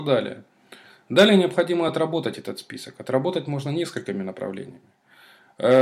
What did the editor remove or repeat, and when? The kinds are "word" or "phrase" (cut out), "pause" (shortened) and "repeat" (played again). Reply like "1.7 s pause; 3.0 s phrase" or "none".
none